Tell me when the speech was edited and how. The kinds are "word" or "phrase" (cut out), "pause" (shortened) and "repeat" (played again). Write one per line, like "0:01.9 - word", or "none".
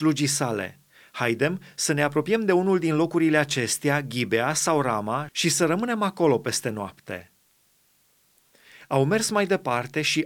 none